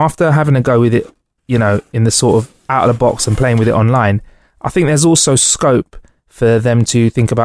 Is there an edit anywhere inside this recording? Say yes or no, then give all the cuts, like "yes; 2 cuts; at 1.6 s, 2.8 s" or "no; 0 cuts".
no; 0 cuts